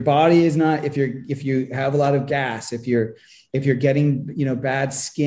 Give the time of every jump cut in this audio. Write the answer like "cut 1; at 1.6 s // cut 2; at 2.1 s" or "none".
none